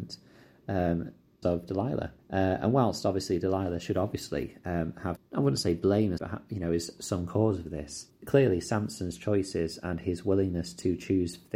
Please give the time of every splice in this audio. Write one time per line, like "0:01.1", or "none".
0:01.4
0:02.2
0:05.2
0:06.2
0:08.1